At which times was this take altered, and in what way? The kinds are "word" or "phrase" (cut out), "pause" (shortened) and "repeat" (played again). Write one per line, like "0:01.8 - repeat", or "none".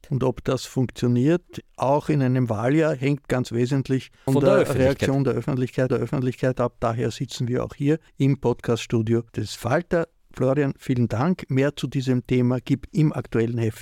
0:04.3 - word
0:05.9 - repeat
0:08.1 - pause
0:09.3 - pause
0:12.9 - word